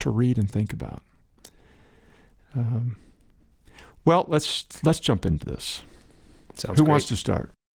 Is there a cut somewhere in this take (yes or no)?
no